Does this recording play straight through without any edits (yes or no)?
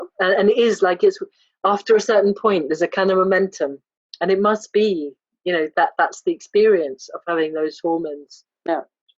no